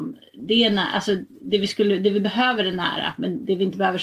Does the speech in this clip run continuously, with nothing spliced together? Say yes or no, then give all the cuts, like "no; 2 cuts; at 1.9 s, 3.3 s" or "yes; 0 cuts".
yes; 0 cuts